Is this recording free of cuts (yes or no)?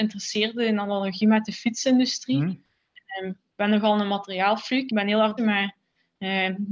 no